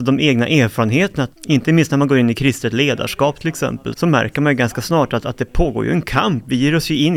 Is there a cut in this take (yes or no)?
yes